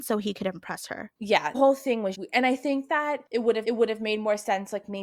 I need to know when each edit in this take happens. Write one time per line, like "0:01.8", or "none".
0:01.5
0:02.1
0:03.6

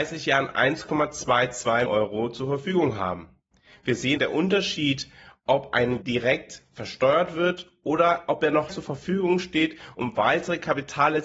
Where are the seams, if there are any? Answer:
0:01.9
0:04.2
0:06.0
0:08.7

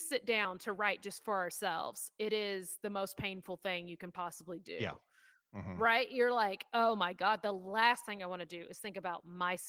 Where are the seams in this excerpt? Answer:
none

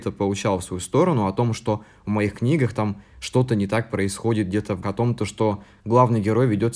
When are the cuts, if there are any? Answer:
0:04.8

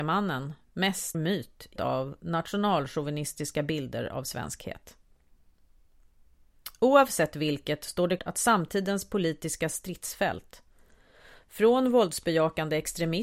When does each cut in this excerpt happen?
0:01.1
0:01.8
0:08.2

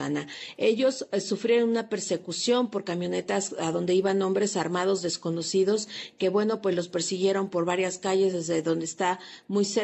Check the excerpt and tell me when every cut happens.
none

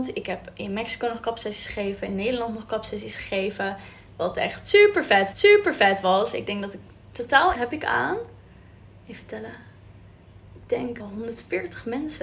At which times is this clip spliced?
0:05.3
0:07.5
0:11.0

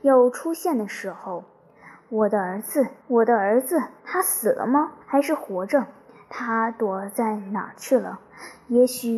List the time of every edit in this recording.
0:03.0
0:04.0
0:05.0

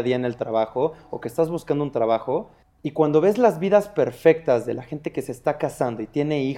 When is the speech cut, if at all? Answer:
0:02.6

